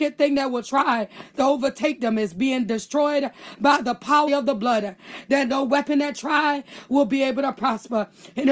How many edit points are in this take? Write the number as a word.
one